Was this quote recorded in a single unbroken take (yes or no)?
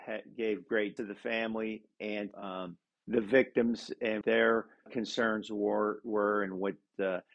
no